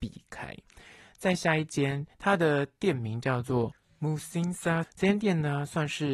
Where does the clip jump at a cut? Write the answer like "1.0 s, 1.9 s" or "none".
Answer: 4.8 s

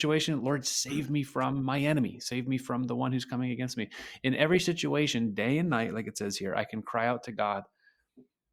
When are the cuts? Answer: none

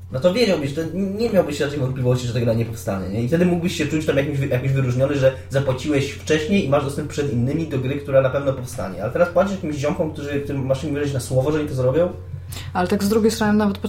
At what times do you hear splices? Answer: none

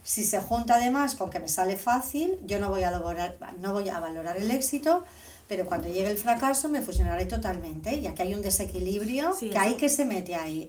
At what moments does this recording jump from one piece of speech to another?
none

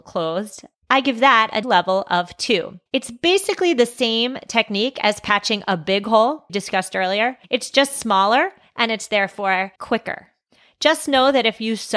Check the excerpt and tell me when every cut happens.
1.6 s, 2.9 s, 6.5 s, 7.4 s, 9.8 s

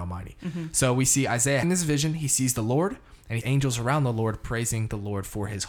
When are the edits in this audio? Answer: 1.6 s, 3.4 s

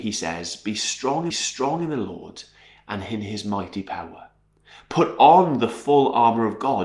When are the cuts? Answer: 1.3 s

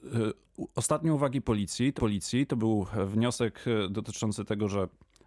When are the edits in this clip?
2.0 s

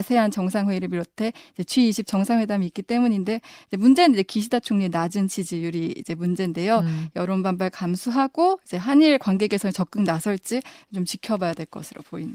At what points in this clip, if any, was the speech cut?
none

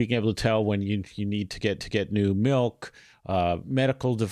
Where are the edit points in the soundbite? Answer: 1.8 s

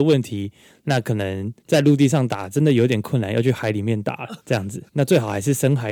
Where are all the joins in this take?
1.6 s, 4.4 s, 4.9 s

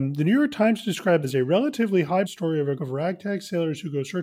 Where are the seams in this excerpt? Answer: 1.2 s, 2.3 s, 2.8 s

